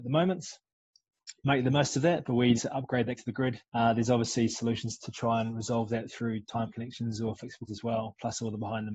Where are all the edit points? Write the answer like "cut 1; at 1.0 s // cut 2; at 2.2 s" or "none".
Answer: cut 1; at 2.6 s // cut 2; at 3.2 s // cut 3; at 3.7 s // cut 4; at 7.7 s

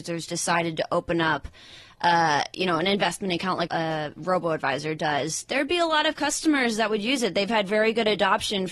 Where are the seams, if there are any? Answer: cut 1; at 3.7 s

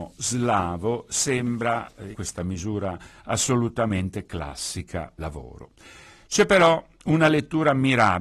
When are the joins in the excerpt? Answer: cut 1; at 2.1 s // cut 2; at 5.2 s

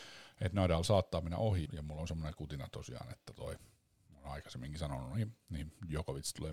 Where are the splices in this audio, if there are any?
cut 1; at 1.7 s

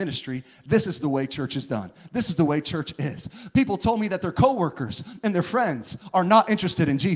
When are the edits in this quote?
none

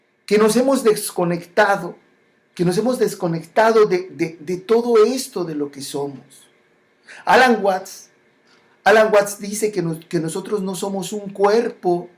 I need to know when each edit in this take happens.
none

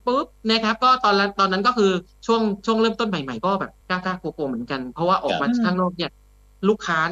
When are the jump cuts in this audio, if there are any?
cut 1; at 3.8 s

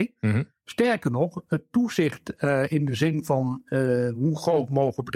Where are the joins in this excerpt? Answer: none

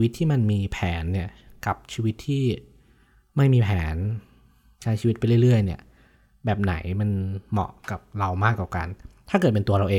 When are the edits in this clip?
none

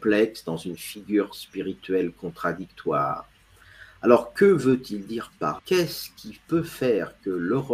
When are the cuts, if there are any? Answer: cut 1; at 5.6 s

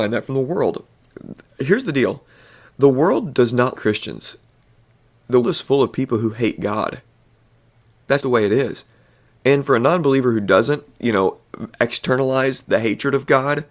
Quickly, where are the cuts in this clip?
cut 1; at 3.7 s // cut 2; at 5.4 s // cut 3; at 8.2 s

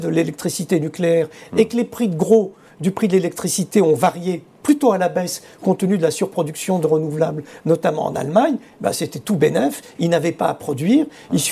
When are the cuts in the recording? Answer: none

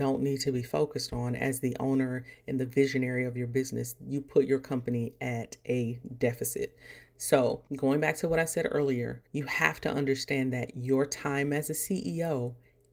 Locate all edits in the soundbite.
cut 1; at 7.7 s // cut 2; at 9.3 s

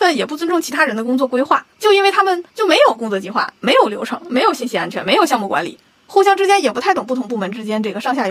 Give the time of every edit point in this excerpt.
cut 1; at 1.7 s // cut 2; at 2.5 s

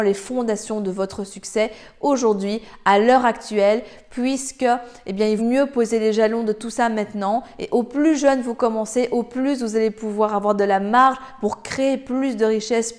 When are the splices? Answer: cut 1; at 5.4 s

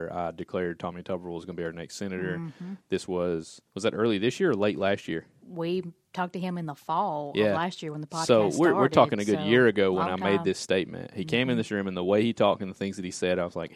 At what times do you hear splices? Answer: cut 1; at 3.7 s

